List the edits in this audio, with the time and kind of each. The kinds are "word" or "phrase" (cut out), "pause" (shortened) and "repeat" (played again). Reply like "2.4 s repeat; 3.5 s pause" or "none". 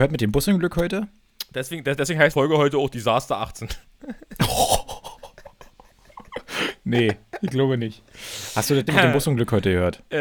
2.3 s word; 8.9 s word